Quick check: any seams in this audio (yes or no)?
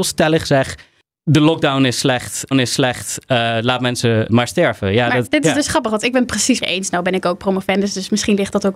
yes